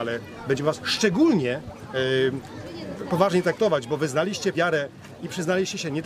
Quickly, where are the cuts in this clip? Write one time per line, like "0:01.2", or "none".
0:04.5